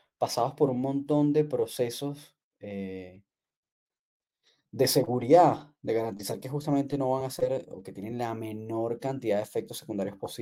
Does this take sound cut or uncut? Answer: uncut